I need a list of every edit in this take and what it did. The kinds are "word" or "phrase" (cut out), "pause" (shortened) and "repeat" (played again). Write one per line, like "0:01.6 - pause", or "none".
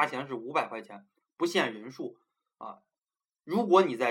none